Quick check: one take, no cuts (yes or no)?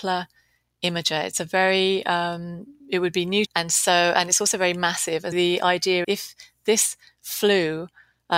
no